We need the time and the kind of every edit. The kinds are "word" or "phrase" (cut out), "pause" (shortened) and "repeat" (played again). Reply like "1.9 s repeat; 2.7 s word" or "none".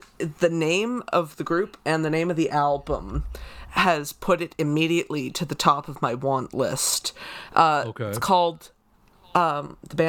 none